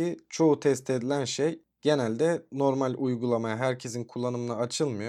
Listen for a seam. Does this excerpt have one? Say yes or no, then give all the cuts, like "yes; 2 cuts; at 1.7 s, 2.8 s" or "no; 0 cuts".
no; 0 cuts